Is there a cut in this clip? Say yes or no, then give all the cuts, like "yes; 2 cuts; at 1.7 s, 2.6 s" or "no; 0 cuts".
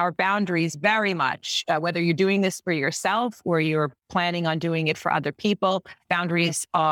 no; 0 cuts